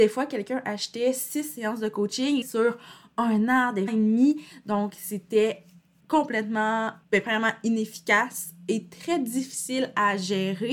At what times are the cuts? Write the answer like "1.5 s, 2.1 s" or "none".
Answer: 2.4 s, 3.9 s, 6.0 s, 7.0 s